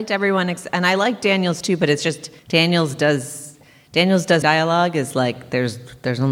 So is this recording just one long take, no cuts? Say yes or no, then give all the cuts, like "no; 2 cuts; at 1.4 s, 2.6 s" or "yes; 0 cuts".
no; 2 cuts; at 2.4 s, 4.4 s